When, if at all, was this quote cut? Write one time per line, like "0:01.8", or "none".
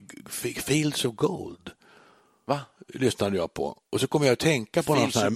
none